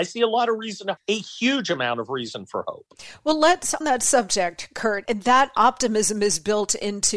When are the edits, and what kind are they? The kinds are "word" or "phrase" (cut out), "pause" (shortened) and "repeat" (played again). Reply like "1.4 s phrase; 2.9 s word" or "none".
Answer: 1.0 s word; 3.8 s word; 5.0 s word